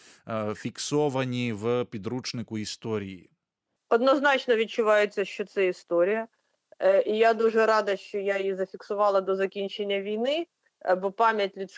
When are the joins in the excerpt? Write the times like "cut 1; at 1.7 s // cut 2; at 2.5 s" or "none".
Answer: none